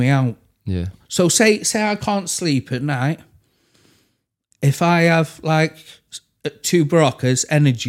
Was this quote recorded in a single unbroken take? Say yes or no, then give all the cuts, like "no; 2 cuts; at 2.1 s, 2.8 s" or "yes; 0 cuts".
yes; 0 cuts